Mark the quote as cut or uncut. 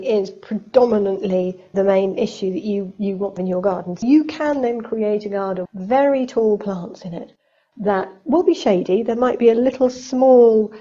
cut